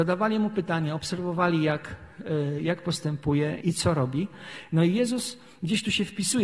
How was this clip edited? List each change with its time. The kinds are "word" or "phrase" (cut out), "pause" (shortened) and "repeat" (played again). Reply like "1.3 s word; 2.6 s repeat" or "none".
3.6 s word